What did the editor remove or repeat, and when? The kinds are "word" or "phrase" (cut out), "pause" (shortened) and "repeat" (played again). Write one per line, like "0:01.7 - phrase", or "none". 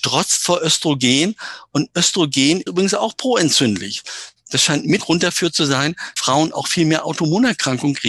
0:02.7 - word
0:05.0 - word
0:06.2 - word